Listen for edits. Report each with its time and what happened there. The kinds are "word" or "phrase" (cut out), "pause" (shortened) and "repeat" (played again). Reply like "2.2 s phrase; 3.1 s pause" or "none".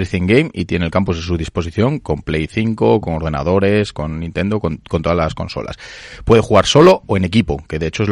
none

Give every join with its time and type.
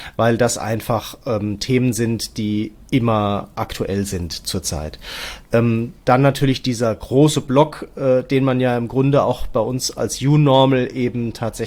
6.0 s pause

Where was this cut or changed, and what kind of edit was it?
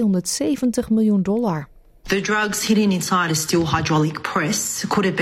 none

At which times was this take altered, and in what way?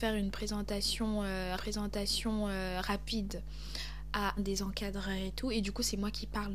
1.6 s repeat; 4.4 s word

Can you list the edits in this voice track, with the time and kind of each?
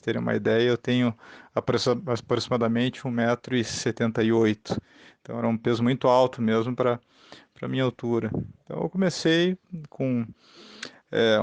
none

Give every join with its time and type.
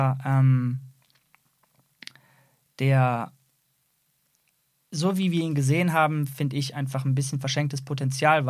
none

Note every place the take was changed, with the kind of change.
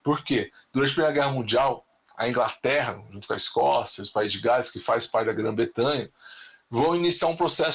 none

